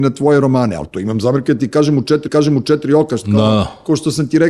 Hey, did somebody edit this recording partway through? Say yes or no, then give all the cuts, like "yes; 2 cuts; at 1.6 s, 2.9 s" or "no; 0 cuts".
yes; 1 cut; at 2.3 s